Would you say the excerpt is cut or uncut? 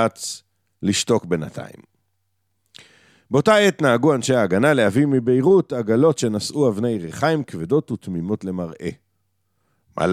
uncut